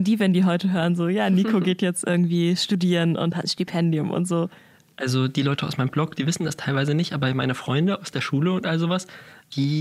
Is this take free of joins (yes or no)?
yes